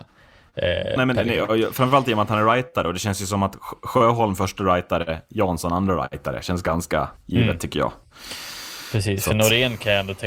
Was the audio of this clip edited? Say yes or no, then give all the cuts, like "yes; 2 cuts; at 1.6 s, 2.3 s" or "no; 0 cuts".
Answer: yes; 2 cuts; at 1.0 s, 7.2 s